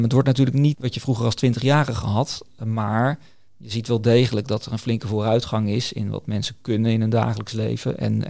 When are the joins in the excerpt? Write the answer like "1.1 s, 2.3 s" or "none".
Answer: none